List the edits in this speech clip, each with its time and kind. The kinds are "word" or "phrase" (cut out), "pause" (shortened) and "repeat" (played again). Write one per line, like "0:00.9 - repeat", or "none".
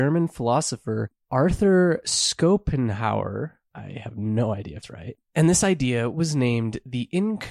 0:04.8 - word

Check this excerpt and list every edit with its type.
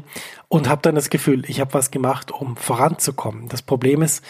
none

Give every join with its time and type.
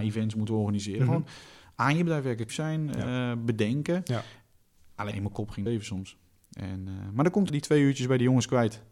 0:02.5 - word
0:05.1 - word
0:05.7 - word
0:07.5 - word

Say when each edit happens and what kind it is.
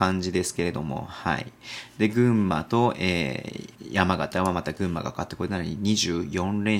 0:03.7 - pause

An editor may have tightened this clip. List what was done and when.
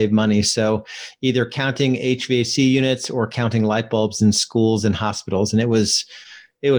none

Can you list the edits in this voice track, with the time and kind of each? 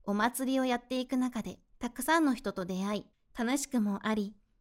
0:01.7 - pause
0:03.1 - pause

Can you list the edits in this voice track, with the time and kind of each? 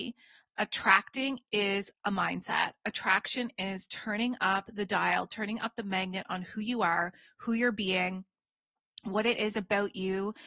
none

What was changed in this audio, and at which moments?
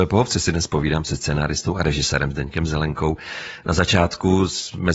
none

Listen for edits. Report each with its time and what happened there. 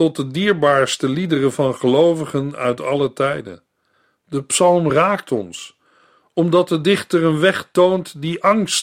none

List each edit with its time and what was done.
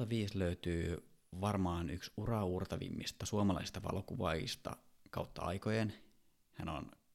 none

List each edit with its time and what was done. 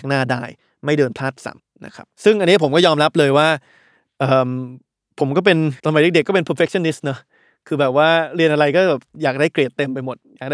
0:01.6 - pause
0:02.1 - pause
0:05.8 - pause

